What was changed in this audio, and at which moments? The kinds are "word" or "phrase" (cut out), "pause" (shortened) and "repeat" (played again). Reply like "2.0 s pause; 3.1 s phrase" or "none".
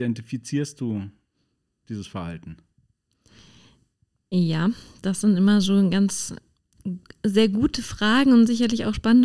none